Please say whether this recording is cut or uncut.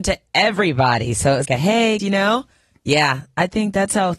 cut